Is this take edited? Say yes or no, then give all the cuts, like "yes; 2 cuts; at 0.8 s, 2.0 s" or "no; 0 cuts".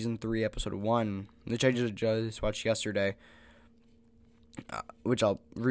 no; 0 cuts